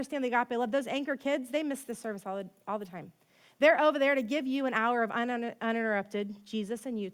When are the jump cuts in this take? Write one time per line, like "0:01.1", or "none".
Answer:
none